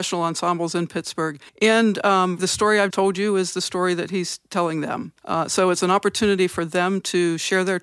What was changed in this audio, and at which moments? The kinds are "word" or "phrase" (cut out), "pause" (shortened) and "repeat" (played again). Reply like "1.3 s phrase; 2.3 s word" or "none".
1.5 s pause; 2.4 s word; 2.9 s word; 5.2 s pause